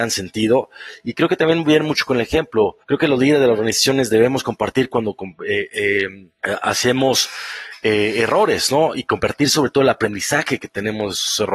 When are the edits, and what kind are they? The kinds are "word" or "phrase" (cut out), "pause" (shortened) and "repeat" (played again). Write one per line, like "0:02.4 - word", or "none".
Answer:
0:02.8 - pause